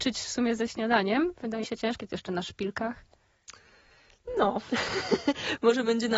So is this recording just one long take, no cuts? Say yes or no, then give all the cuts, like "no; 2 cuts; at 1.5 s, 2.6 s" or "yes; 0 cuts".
no; 1 cut; at 1.6 s